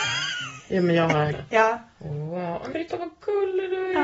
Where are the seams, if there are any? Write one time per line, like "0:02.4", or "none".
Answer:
0:01.3
0:02.7